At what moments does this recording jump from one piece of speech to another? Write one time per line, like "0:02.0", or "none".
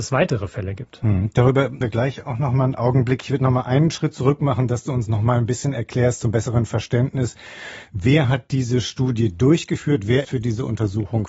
0:01.8
0:10.2

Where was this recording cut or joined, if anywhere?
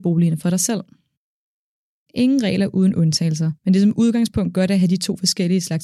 0:03.6

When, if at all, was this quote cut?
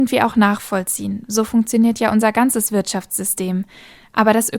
none

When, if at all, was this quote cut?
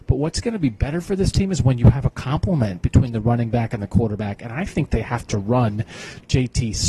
none

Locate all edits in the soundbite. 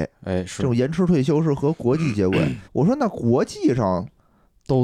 0:02.6

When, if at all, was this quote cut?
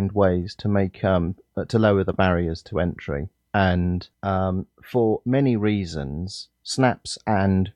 0:04.1
0:06.6

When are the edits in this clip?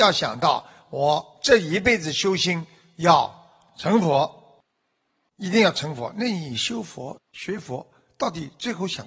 0:07.3

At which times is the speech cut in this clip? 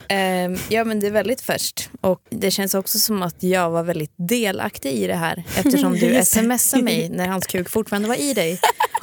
0:02.3

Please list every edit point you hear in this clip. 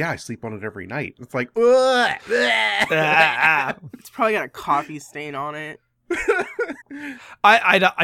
0:06.8

